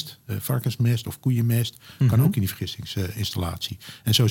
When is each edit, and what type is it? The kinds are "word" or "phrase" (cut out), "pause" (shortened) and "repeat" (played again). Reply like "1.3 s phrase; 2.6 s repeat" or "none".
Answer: none